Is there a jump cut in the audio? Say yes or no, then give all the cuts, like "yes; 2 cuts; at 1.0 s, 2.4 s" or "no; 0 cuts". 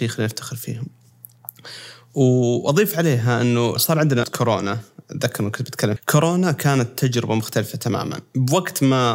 yes; 3 cuts; at 3.8 s, 4.2 s, 6.0 s